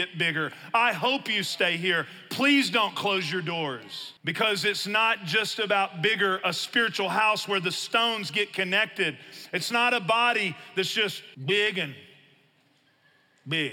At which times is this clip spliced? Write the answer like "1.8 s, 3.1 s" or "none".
4.2 s, 11.3 s